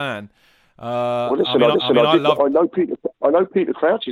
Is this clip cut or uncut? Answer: cut